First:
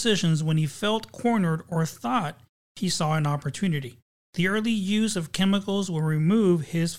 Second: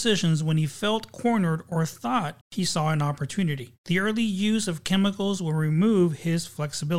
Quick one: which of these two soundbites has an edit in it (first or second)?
second